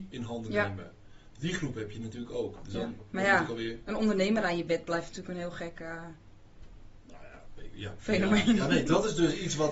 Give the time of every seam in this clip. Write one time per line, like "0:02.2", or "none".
none